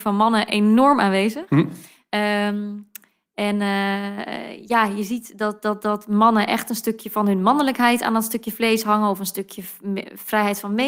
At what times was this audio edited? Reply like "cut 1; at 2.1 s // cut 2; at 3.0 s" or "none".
none